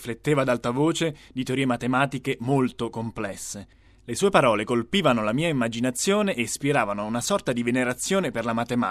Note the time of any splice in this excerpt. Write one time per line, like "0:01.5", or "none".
none